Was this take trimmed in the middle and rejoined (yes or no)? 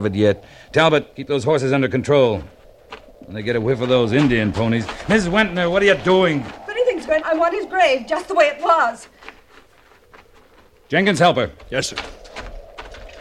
yes